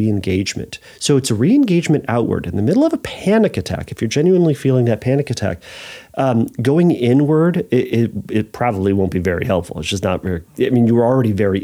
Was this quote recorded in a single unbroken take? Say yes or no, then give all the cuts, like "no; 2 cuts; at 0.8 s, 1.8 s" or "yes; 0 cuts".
yes; 0 cuts